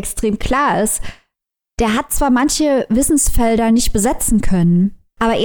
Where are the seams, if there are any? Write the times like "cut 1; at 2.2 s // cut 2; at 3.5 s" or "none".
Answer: none